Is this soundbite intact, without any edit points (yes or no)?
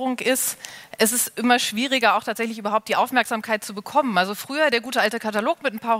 yes